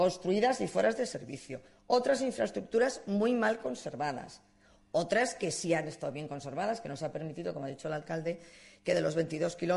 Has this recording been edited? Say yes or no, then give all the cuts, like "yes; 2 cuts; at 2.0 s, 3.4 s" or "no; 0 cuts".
no; 0 cuts